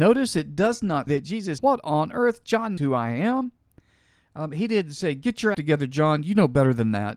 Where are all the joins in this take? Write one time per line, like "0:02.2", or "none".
0:01.1
0:01.6
0:02.8
0:05.5